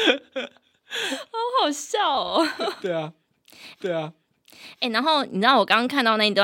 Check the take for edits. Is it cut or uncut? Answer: cut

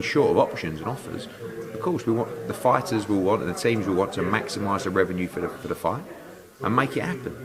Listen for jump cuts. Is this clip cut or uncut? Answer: uncut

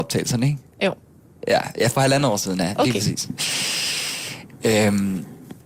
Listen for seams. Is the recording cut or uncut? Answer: uncut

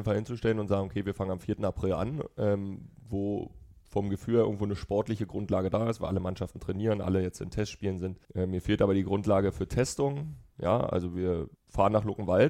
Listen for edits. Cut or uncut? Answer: cut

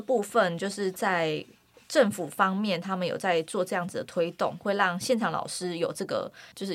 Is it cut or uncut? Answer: uncut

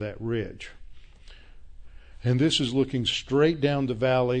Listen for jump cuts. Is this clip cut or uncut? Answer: uncut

